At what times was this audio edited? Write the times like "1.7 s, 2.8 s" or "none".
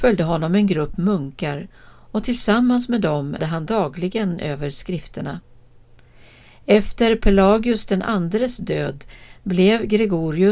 3.4 s